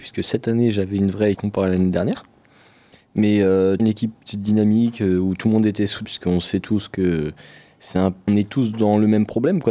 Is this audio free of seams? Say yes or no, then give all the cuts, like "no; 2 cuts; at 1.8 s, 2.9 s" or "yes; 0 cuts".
no; 4 cuts; at 1.3 s, 3.8 s, 6.0 s, 8.3 s